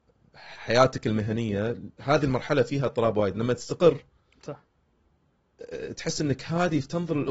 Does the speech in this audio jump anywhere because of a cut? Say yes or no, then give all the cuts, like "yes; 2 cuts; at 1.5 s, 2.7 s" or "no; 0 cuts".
no; 0 cuts